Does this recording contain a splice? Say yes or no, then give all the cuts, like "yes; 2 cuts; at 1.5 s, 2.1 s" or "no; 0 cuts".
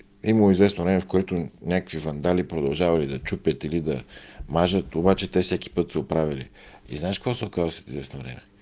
no; 0 cuts